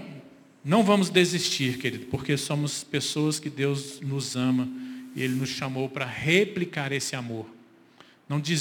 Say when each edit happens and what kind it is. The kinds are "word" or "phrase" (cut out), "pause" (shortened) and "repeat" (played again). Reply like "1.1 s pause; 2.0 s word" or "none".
none